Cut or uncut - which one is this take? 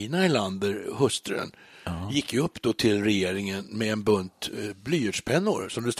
uncut